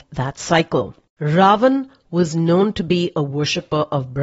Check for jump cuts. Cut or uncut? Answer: uncut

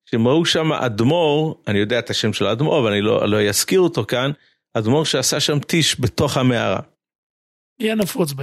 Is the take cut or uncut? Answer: uncut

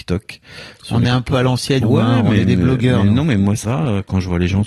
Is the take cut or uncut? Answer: cut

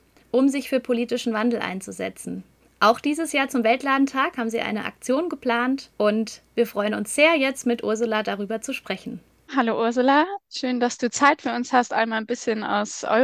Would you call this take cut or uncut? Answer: cut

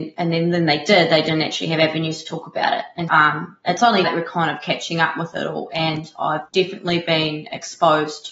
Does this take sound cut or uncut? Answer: cut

